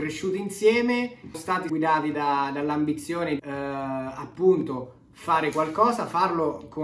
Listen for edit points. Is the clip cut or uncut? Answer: cut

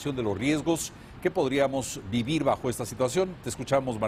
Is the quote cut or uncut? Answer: uncut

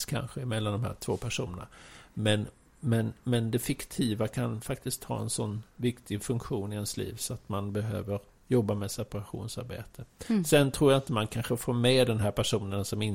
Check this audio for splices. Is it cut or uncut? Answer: uncut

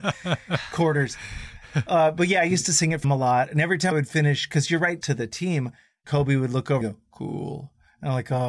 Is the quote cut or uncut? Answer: cut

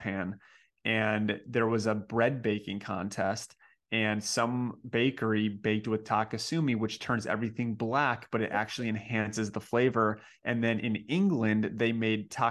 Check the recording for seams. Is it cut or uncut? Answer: uncut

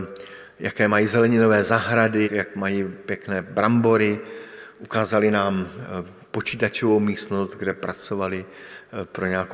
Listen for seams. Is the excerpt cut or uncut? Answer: cut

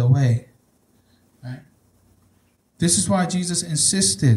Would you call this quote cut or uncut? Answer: uncut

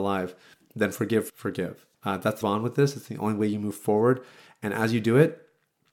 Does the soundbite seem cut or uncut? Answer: cut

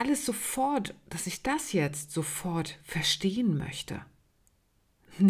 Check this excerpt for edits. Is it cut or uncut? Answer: uncut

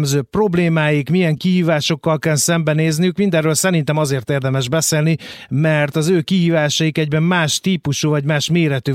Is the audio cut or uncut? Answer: uncut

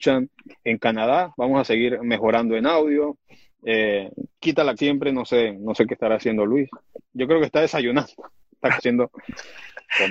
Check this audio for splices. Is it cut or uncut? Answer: cut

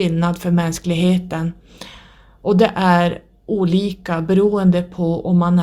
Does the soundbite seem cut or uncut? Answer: uncut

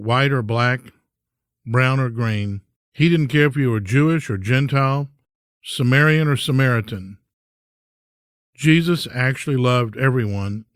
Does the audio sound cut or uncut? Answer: cut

